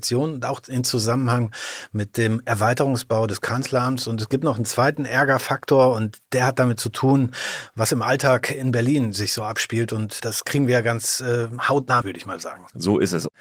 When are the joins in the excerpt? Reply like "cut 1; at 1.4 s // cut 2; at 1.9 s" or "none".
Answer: cut 1; at 10.2 s // cut 2; at 12.0 s